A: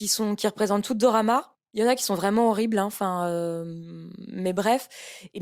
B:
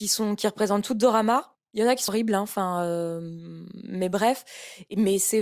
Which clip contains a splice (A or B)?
B